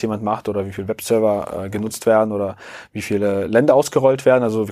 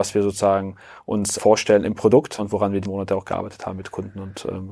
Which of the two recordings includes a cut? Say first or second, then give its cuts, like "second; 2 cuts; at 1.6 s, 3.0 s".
second; 3 cuts; at 1.4 s, 2.4 s, 2.8 s